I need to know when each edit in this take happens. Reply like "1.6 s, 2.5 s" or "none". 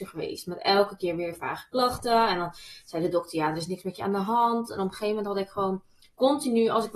none